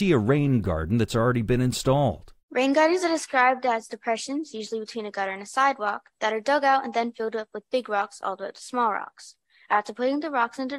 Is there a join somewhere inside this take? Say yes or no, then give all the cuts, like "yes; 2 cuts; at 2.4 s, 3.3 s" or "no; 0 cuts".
no; 0 cuts